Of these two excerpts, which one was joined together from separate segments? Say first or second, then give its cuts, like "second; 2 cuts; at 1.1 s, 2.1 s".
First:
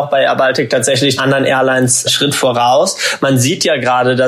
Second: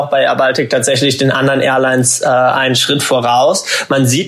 first; 2 cuts; at 1.2 s, 2.1 s